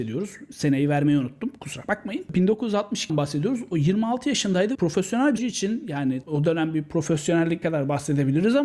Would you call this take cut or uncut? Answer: cut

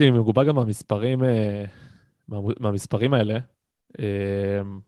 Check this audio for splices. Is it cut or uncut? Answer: uncut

